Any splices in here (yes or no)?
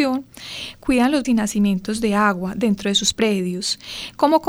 yes